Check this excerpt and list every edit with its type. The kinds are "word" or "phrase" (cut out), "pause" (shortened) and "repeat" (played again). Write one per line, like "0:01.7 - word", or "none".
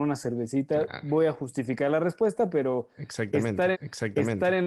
0:03.7 - repeat